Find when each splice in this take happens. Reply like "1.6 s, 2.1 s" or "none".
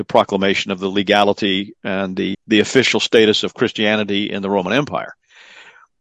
2.3 s